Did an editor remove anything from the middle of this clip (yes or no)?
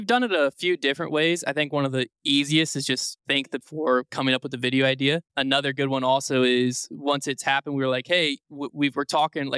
yes